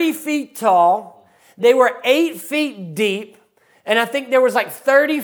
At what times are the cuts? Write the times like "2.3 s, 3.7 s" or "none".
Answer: none